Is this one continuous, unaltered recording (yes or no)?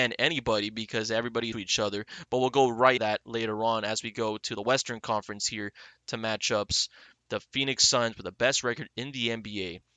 no